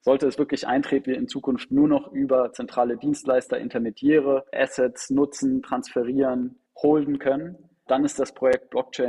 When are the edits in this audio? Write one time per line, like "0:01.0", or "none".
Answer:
0:01.0
0:04.5
0:06.7
0:07.9

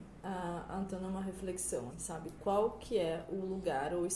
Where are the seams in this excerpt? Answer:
0:01.9

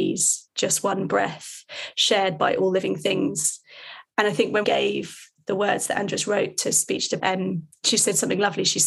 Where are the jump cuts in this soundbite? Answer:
0:04.6
0:07.2

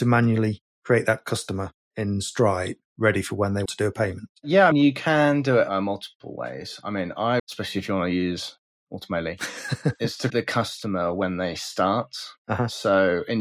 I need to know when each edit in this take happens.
0:03.7
0:04.7
0:07.4
0:10.3

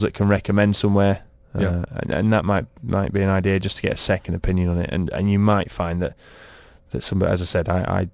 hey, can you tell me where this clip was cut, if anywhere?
none

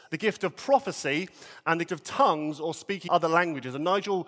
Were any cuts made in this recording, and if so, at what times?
0:01.9
0:03.1

